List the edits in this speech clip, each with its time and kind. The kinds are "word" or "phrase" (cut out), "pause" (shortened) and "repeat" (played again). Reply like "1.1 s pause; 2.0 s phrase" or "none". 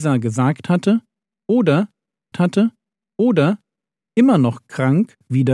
2.3 s repeat